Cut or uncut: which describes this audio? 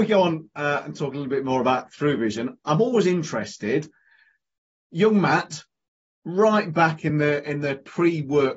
uncut